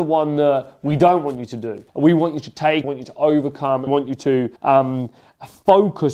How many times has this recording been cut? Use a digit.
4